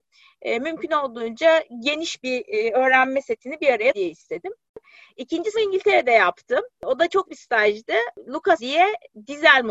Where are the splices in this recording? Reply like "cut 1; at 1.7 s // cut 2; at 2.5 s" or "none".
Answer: cut 1; at 3.9 s // cut 2; at 5.5 s // cut 3; at 7.3 s // cut 4; at 8.6 s